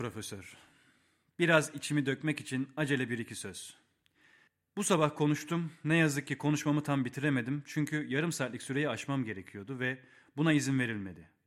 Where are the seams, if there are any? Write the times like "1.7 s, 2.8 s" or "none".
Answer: none